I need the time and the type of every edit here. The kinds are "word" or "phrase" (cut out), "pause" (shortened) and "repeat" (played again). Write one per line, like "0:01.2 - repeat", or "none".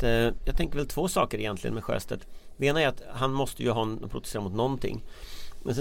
none